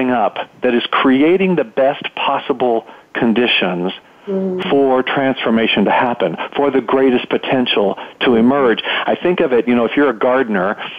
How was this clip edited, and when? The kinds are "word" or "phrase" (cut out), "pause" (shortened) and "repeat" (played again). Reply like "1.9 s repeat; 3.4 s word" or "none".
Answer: none